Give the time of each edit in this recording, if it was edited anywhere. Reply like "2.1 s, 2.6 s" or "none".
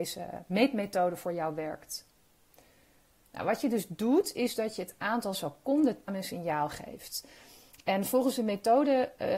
6.1 s